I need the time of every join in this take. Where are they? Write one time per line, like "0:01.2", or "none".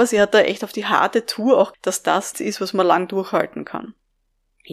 0:01.7
0:02.3

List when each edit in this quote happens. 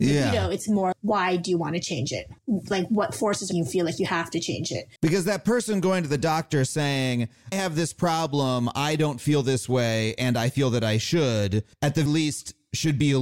0:00.9
0:02.4
0:03.5
0:05.0
0:07.5
0:11.7
0:12.1

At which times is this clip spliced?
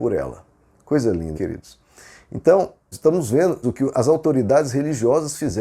0:01.3
0:02.9
0:03.6

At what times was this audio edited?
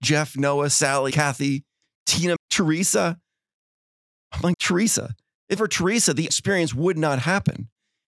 0:01.1
0:02.4
0:04.5
0:05.6
0:06.3

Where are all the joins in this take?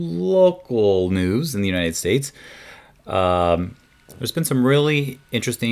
none

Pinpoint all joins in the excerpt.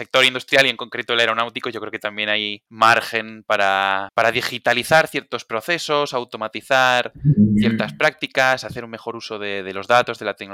0:02.7

